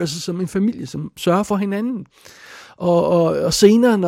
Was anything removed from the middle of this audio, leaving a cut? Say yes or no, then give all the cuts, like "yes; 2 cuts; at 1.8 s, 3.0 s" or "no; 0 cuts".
yes; 1 cut; at 1.2 s